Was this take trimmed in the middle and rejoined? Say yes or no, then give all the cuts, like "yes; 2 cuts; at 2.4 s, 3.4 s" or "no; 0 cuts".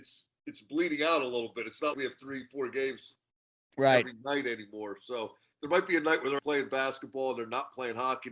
yes; 2 cuts; at 1.9 s, 6.4 s